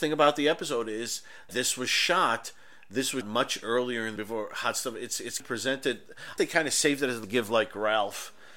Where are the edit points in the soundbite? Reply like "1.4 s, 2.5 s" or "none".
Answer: 1.5 s, 3.2 s, 4.2 s, 5.4 s, 6.4 s, 7.2 s